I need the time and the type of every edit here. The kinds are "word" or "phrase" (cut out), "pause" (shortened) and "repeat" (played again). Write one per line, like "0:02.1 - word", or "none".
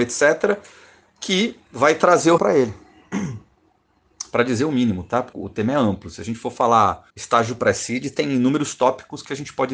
0:02.4 - word
0:05.3 - word
0:07.1 - pause